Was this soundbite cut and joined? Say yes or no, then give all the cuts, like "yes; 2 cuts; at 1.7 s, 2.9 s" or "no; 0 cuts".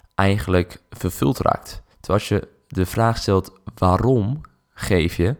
yes; 1 cut; at 1.9 s